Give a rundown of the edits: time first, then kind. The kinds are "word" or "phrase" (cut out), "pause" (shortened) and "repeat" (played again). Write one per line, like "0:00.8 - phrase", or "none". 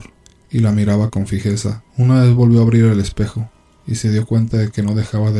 0:01.9 - pause